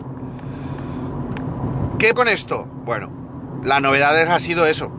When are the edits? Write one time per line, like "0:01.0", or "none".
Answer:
0:02.1

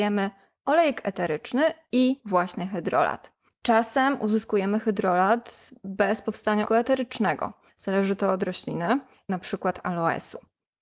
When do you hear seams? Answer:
0:06.7
0:09.3

